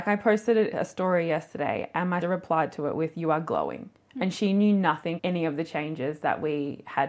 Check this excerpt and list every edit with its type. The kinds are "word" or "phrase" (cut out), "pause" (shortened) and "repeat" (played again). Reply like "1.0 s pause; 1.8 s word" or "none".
2.2 s word; 5.2 s word